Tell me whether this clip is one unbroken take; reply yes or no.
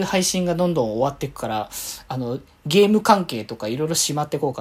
yes